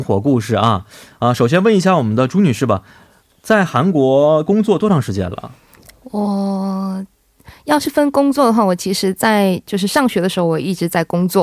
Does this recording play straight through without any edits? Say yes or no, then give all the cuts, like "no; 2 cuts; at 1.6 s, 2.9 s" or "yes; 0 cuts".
yes; 0 cuts